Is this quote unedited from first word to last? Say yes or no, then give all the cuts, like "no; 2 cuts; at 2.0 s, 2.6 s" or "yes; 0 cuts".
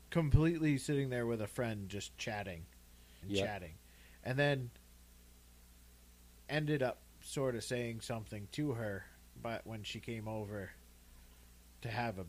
no; 3 cuts; at 3.2 s, 6.4 s, 7.1 s